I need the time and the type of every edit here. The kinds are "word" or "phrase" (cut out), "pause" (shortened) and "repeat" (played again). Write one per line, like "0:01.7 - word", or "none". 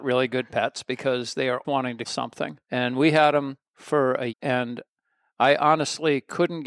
0:01.6 - word
0:02.0 - word
0:02.6 - pause
0:03.7 - pause
0:04.3 - word